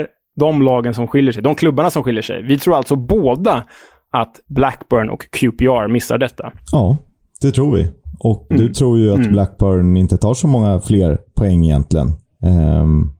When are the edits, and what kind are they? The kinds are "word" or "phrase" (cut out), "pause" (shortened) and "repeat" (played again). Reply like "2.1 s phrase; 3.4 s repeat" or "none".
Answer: 8.5 s word